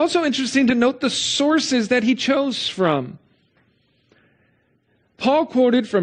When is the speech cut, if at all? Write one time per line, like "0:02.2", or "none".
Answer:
none